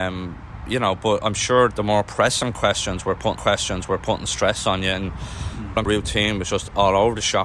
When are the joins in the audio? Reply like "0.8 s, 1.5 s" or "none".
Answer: 1.7 s, 3.4 s, 5.9 s